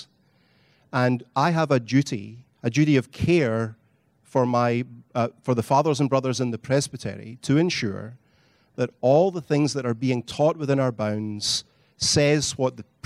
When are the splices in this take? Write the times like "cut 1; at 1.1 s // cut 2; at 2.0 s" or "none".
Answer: cut 1; at 2.5 s